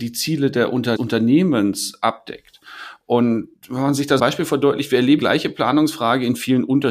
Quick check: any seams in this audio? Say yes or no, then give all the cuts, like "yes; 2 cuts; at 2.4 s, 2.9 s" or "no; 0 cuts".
yes; 4 cuts; at 1.0 s, 3.6 s, 4.2 s, 5.2 s